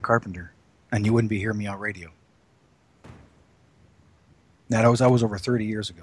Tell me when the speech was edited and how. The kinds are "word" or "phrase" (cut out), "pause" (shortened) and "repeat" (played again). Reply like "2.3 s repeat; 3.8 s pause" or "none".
none